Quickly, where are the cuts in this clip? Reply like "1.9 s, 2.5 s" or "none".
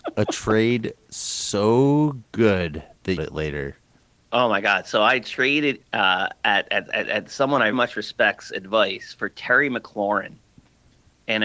3.2 s, 4.0 s, 5.8 s, 7.7 s

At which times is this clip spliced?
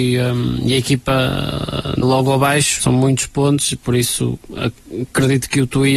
2.0 s, 2.8 s

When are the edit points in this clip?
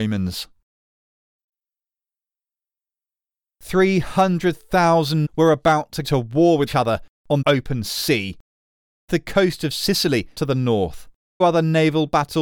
5.2 s, 6.0 s, 6.7 s, 7.4 s, 9.1 s, 10.3 s, 11.4 s

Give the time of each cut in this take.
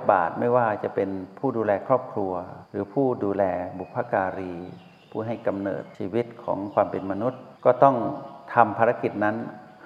2.7 s, 7.6 s

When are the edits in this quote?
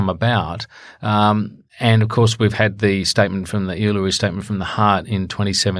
1.7 s

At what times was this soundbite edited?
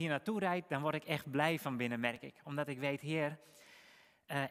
none

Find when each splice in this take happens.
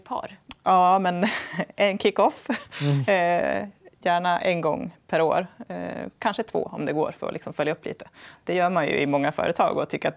none

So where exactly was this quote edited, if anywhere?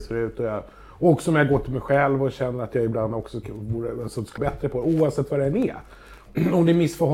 4.4 s

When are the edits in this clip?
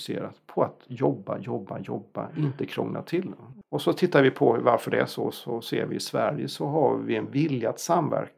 3.6 s

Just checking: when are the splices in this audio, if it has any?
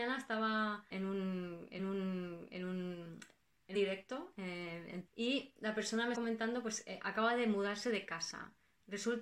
0.9 s, 1.8 s, 3.7 s, 5.1 s, 6.1 s

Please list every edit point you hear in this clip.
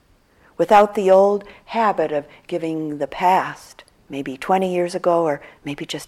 4.0 s

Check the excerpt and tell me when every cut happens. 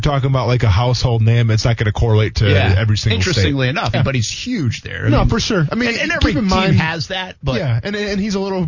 3.9 s

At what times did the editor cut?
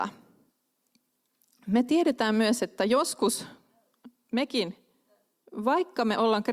none

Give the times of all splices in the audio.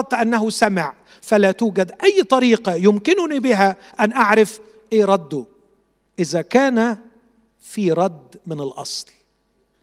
none

